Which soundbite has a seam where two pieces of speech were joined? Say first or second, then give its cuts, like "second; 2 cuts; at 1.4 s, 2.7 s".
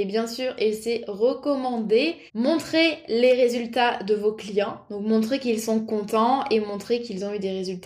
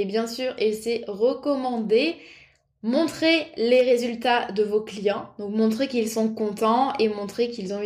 first; 1 cut; at 2.3 s